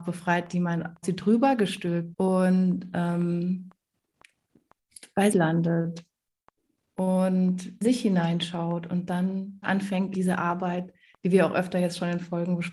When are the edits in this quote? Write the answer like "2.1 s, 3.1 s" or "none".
1.0 s, 2.1 s, 5.3 s, 7.8 s, 9.6 s, 10.1 s